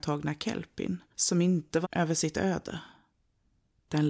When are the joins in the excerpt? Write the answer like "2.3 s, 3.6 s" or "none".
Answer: 1.8 s